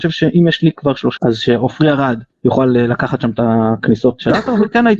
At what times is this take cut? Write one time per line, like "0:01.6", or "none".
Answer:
0:01.2
0:02.3